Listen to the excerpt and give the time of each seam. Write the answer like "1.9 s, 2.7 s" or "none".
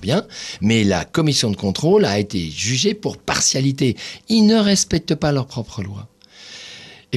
none